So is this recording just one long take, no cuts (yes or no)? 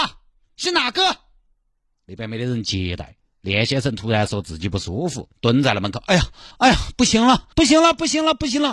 no